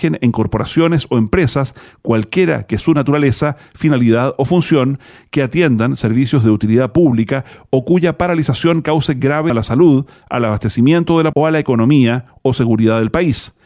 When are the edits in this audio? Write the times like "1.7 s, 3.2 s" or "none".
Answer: 2.8 s, 9.5 s, 11.3 s

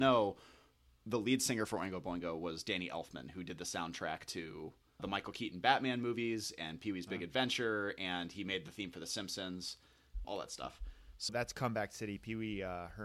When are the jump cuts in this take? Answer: 5.0 s, 10.2 s, 11.3 s

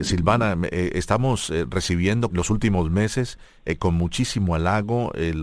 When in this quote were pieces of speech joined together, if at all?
2.3 s

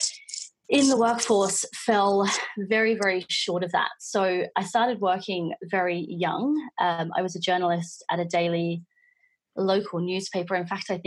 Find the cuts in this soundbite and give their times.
none

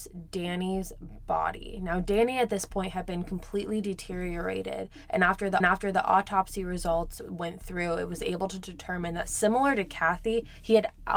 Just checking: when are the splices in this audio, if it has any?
5.6 s

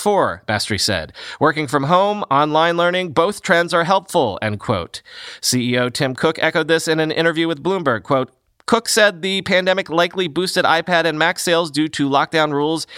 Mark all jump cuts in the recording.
none

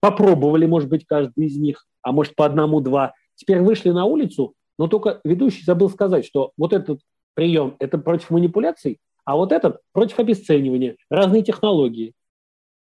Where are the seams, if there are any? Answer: none

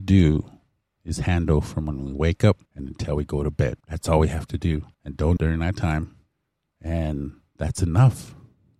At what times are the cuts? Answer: 2.7 s, 3.8 s, 4.9 s, 5.4 s, 6.3 s

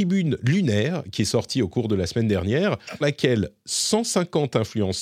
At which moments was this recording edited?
3.0 s

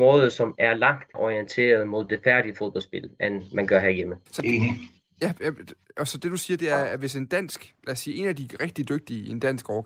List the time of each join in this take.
1.1 s, 4.3 s

